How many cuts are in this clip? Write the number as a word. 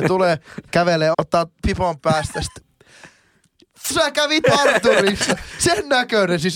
four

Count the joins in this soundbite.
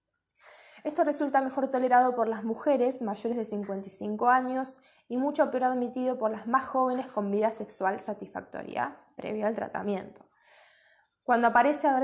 zero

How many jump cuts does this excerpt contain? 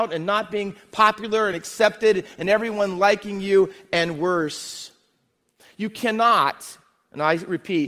zero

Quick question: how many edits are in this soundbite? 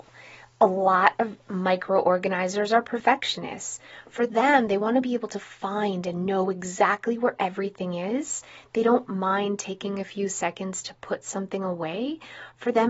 zero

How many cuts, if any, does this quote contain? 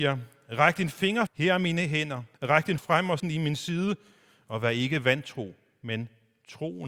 four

